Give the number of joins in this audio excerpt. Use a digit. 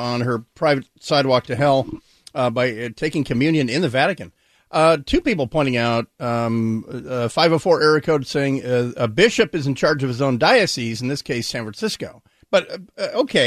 0